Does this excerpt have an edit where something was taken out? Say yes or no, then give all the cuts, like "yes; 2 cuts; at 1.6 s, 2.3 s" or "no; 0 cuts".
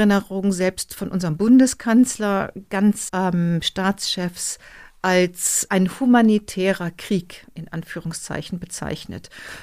yes; 2 cuts; at 3.1 s, 5.7 s